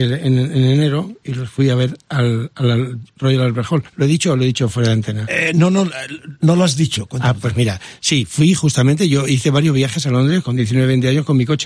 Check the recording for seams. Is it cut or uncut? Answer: cut